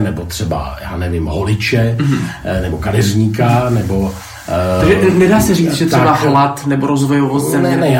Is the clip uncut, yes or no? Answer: yes